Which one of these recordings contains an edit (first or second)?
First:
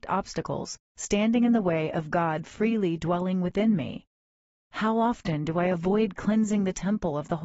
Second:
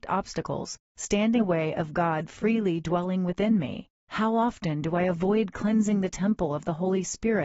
second